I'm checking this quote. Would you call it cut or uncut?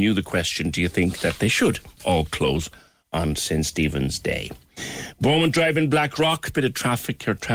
uncut